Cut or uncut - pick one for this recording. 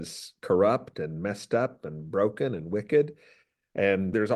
uncut